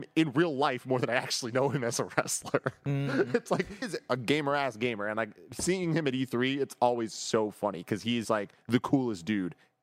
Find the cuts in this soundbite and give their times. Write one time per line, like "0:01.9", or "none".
0:03.8
0:08.2